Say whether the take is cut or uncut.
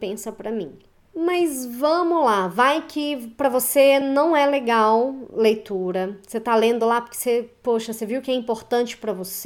uncut